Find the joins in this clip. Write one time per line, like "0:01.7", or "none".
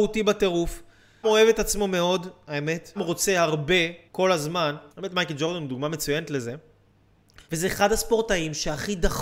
0:01.2
0:03.0
0:04.1
0:04.9
0:07.4